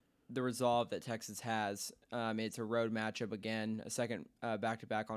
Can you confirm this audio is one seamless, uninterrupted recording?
yes; 0 cuts

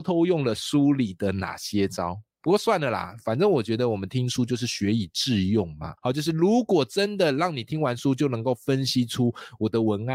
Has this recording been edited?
yes; 1 cut; at 6.0 s

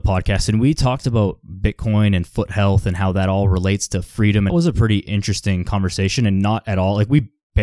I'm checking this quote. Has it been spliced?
yes; 1 cut; at 4.5 s

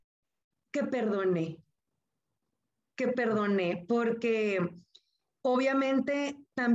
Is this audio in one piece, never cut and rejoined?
yes; 0 cuts

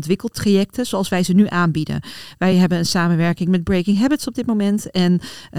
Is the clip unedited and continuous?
yes; 0 cuts

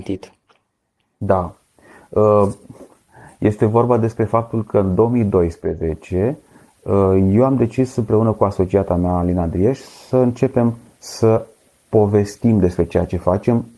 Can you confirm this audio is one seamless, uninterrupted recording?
yes; 0 cuts

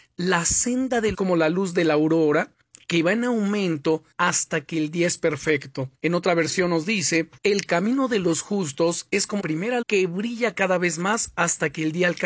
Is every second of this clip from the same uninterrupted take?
no; 6 cuts; at 1.1 s, 4.1 s, 6.0 s, 7.4 s, 9.4 s, 9.8 s

